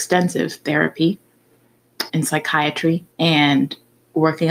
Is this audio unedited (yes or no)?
no